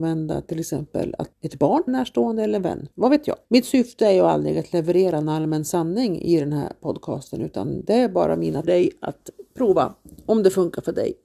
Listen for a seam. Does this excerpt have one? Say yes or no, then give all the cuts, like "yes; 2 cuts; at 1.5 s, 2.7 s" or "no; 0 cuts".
yes; 5 cuts; at 1.3 s, 1.9 s, 2.9 s, 3.4 s, 8.6 s